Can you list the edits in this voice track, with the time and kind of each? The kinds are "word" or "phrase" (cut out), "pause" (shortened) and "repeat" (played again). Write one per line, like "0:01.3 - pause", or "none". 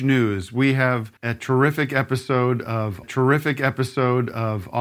0:01.2 - pause
0:03.0 - repeat

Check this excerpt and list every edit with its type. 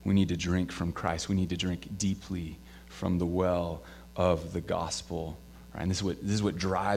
none

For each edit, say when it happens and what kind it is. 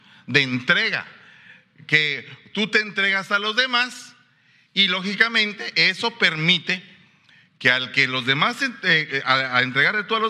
none

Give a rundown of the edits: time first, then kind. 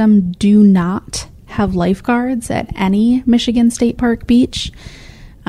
none

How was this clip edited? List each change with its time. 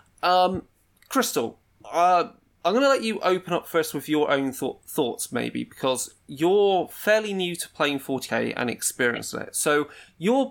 none

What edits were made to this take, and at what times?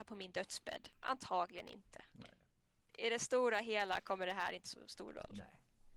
0:04.6 - word

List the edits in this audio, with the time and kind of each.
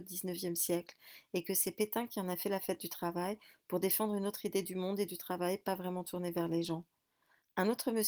none

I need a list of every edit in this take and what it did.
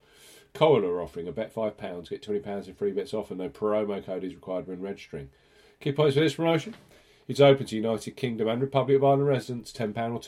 none

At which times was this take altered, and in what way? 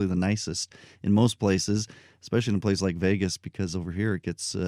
none

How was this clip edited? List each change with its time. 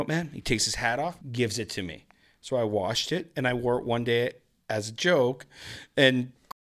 0:01.2 - pause

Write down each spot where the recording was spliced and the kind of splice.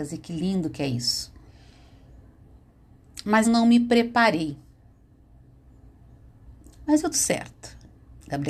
0:03.4 - word
0:07.1 - word

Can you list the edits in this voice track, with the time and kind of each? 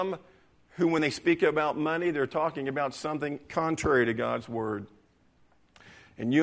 none

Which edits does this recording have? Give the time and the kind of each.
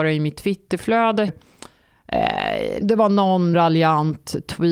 0:01.3 - word
0:02.8 - word
0:03.5 - word

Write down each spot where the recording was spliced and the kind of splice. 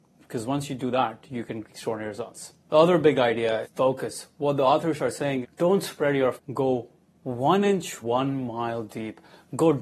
0:01.6 - word
0:02.6 - pause
0:03.6 - word
0:05.4 - word
0:06.4 - word
0:08.0 - phrase

